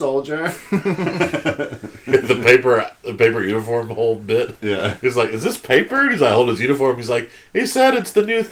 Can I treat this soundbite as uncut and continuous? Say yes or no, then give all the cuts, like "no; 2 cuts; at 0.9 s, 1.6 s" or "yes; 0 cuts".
yes; 0 cuts